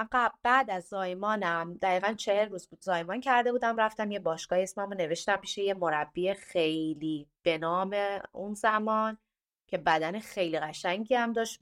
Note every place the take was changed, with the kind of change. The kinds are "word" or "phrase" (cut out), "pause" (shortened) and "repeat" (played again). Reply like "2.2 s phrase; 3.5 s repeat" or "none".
none

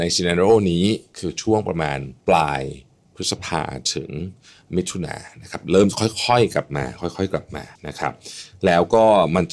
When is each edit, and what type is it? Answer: 2.2 s pause; 7.8 s pause

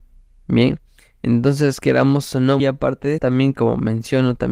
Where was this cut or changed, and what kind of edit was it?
2.6 s word; 3.2 s word

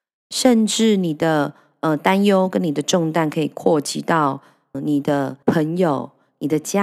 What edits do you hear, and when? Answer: 4.7 s word; 5.4 s pause

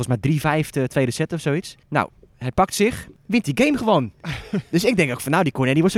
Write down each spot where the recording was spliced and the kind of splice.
1.8 s pause

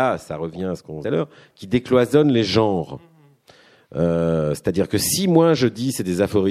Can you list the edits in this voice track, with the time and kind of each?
1.0 s phrase

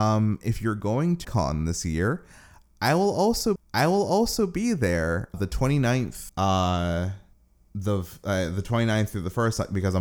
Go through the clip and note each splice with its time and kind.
1.2 s phrase; 3.6 s repeat; 5.3 s word; 6.3 s phrase; 7.3 s pause

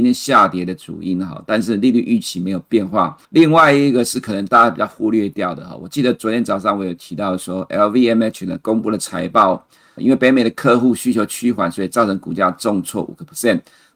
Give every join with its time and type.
3.2 s pause; 10.0 s word

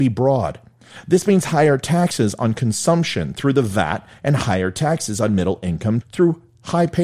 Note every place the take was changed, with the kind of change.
6.0 s word

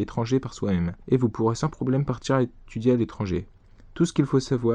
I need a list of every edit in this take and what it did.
1.0 s pause

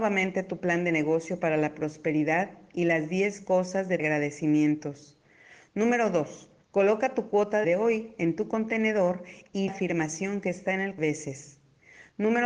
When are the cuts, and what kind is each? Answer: 4.0 s phrase; 6.6 s pause; 7.6 s phrase; 9.7 s phrase; 11.0 s phrase

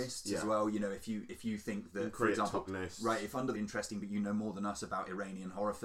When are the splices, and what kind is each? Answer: 2.7 s word; 3.5 s phrase

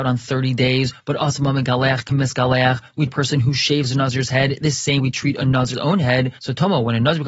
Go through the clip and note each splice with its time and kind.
3.1 s word; 5.0 s word; 5.7 s phrase

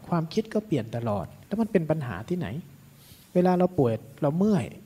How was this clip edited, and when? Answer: 1.5 s pause; 3.2 s pause

